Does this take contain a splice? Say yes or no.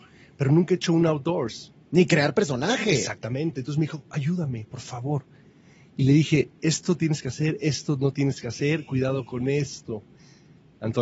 no